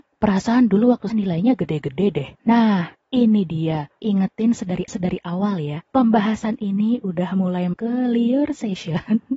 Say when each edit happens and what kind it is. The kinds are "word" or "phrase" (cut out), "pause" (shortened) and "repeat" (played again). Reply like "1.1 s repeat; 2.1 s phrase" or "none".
1.1 s word; 2.4 s pause; 4.0 s word; 4.9 s repeat; 5.9 s pause; 7.7 s word